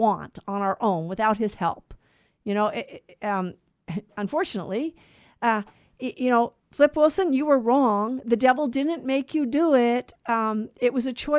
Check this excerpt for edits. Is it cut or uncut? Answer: uncut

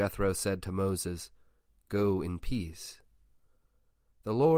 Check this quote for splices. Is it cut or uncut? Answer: uncut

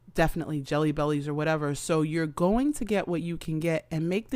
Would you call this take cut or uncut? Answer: uncut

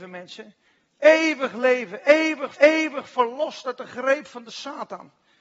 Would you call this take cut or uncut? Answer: cut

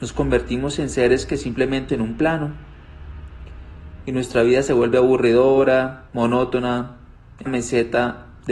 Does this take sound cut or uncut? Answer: cut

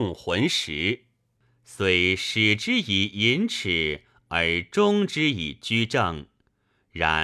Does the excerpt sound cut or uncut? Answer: uncut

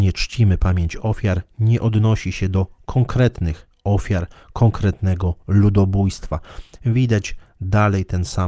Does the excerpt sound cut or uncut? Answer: uncut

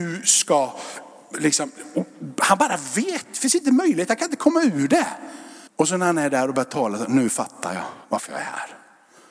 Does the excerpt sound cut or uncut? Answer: cut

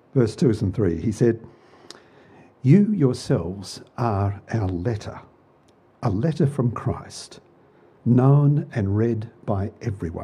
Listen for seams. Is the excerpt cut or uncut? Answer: uncut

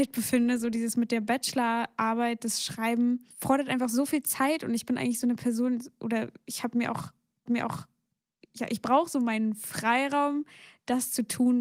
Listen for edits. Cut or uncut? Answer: cut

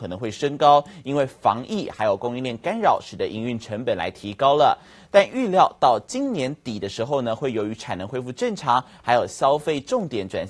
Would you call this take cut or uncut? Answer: uncut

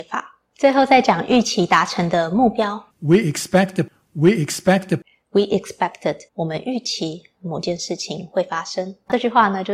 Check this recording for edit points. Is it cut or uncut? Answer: cut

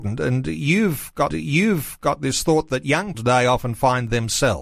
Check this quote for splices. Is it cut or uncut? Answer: cut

